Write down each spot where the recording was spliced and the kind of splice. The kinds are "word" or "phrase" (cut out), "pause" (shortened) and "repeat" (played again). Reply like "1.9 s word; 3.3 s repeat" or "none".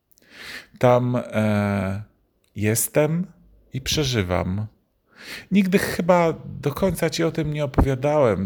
2.4 s pause